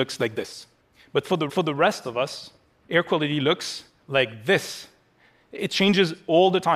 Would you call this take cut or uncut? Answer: cut